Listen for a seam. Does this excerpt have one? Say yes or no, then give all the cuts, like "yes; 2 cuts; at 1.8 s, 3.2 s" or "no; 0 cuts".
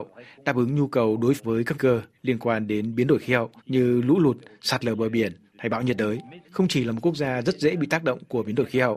yes; 4 cuts; at 1.4 s, 1.7 s, 3.6 s, 6.4 s